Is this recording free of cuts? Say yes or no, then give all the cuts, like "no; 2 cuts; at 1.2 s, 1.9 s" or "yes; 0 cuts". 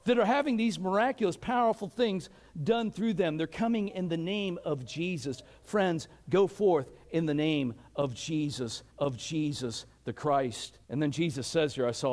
no; 2 cuts; at 8.9 s, 10.8 s